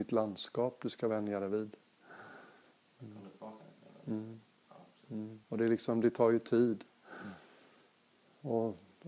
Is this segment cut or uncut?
cut